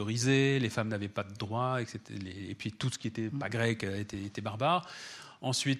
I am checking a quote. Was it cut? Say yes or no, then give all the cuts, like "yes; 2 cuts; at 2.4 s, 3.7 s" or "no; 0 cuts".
no; 0 cuts